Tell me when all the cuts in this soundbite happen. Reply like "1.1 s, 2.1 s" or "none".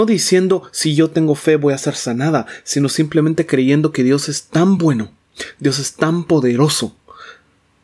none